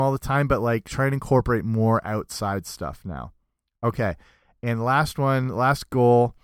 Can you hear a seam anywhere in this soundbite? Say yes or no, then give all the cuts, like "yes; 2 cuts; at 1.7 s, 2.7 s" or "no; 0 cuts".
no; 0 cuts